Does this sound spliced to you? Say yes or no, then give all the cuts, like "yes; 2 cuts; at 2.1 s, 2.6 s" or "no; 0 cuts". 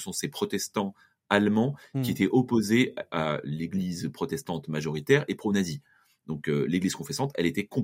no; 0 cuts